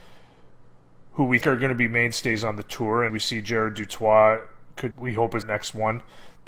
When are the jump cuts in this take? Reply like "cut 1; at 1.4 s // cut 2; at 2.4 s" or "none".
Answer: cut 1; at 1.4 s // cut 2; at 3.1 s // cut 3; at 4.9 s // cut 4; at 5.4 s